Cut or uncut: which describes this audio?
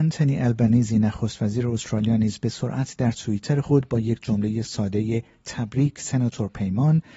uncut